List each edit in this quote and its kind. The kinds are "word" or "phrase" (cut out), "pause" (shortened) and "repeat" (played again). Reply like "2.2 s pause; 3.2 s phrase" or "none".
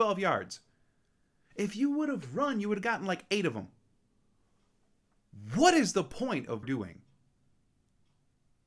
6.6 s phrase